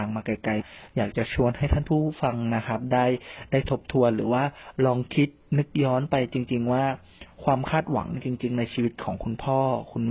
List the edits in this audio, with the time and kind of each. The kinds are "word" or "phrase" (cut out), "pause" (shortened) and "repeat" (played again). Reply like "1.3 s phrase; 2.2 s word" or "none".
none